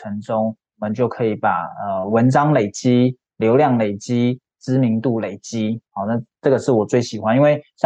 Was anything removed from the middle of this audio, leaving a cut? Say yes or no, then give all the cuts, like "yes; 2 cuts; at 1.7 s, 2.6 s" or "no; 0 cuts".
yes; 1 cut; at 5.9 s